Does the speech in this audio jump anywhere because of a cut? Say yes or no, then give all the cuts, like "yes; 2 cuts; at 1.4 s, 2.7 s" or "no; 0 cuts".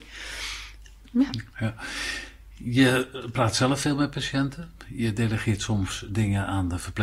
yes; 1 cut; at 1.5 s